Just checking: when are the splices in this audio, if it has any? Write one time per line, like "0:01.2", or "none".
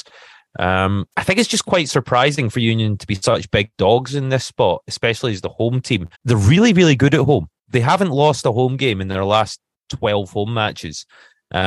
0:01.1
0:06.1
0:07.6